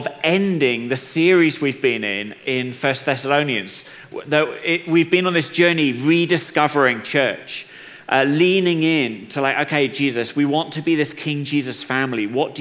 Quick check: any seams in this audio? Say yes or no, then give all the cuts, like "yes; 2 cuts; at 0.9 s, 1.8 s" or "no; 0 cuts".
no; 0 cuts